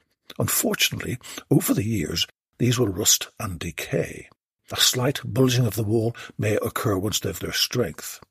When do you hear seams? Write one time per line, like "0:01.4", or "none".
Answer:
0:07.4